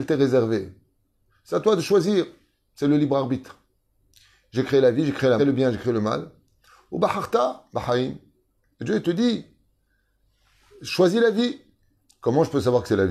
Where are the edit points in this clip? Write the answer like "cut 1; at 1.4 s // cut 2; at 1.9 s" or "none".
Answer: cut 1; at 5.4 s